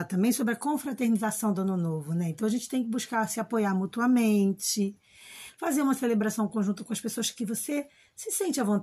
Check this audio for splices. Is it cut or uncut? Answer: uncut